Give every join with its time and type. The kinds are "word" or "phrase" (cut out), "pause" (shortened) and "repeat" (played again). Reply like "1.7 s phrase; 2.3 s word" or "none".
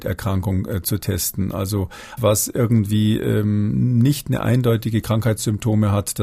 2.2 s word